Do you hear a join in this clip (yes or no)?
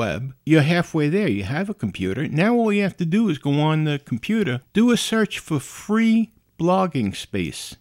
no